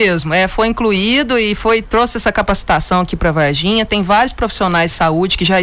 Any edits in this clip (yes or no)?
yes